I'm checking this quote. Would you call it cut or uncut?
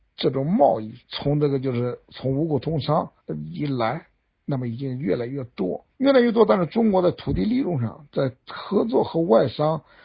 cut